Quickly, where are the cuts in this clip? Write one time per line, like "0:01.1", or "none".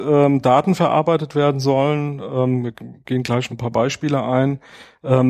0:03.5

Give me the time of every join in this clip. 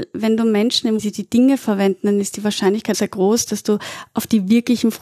0:01.0
0:02.9

